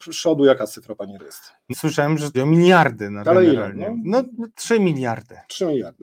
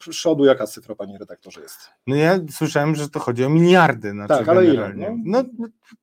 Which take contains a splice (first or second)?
first